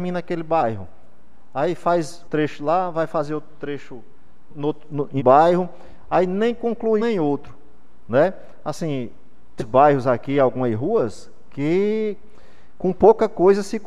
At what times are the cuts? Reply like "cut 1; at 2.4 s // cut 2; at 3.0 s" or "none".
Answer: cut 1; at 2.3 s // cut 2; at 4.5 s // cut 3; at 5.2 s // cut 4; at 7.0 s // cut 5; at 9.6 s